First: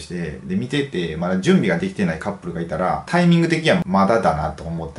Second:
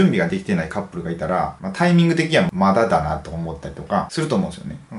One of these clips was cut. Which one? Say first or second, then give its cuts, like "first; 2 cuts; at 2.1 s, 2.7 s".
first; 1 cut; at 3.1 s